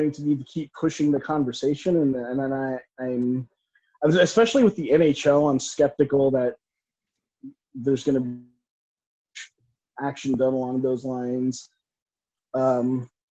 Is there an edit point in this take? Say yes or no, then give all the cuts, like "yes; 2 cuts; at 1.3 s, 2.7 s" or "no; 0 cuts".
no; 0 cuts